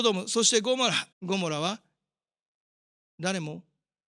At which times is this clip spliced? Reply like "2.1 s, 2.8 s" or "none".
1.1 s